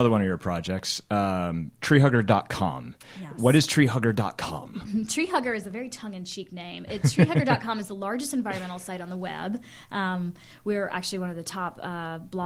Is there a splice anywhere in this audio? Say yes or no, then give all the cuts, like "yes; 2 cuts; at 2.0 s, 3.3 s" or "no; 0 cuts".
no; 0 cuts